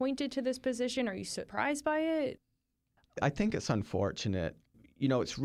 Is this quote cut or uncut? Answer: uncut